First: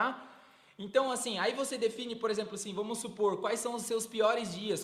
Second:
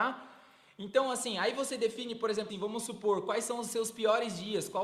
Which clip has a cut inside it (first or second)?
second